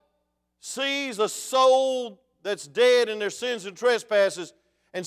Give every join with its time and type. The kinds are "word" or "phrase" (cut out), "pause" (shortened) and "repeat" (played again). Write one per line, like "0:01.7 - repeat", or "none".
none